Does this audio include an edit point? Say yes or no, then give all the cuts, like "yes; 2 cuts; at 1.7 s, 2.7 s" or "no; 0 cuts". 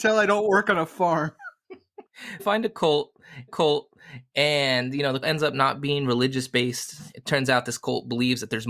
yes; 3 cuts; at 2.4 s, 3.5 s, 5.2 s